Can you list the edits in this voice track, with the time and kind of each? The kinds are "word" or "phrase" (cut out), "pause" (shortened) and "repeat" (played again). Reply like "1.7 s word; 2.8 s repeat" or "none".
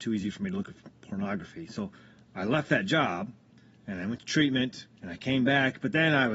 5.0 s pause